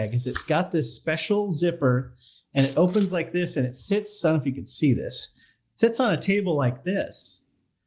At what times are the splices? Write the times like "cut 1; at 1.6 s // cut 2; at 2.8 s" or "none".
none